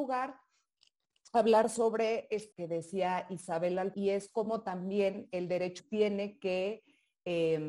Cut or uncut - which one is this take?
cut